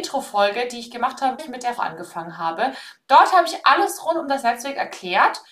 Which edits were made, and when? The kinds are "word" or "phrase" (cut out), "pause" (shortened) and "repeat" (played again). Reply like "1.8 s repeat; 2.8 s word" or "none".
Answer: 1.4 s word; 1.8 s word